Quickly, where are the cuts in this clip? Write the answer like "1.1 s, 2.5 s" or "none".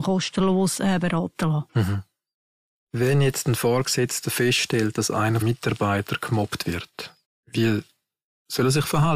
1.7 s, 5.4 s, 7.2 s